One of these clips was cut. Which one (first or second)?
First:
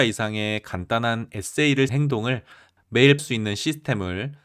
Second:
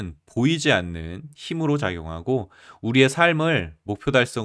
first